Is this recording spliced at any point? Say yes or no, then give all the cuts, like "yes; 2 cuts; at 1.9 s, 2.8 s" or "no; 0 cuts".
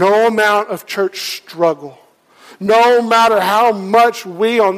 no; 0 cuts